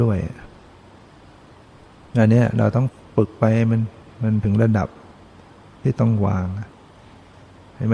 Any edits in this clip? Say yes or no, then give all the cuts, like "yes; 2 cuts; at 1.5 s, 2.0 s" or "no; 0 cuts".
no; 0 cuts